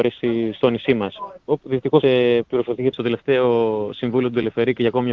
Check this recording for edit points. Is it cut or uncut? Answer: cut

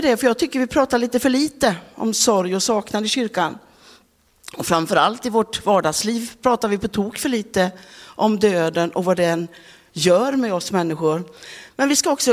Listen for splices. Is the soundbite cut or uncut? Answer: uncut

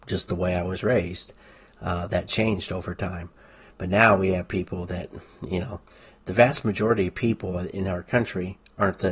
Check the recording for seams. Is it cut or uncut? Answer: uncut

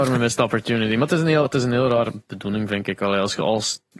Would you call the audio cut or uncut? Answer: cut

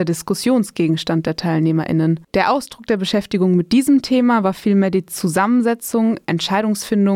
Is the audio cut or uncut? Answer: cut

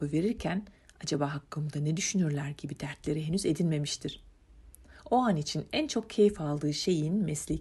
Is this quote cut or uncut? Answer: uncut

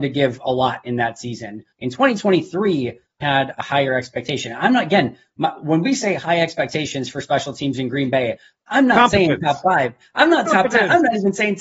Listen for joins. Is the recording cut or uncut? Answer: cut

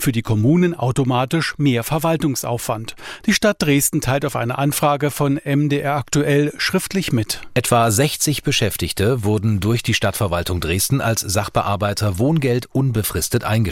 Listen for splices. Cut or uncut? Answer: uncut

